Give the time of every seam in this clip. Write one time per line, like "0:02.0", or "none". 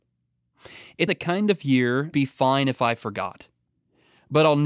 0:01.1
0:02.1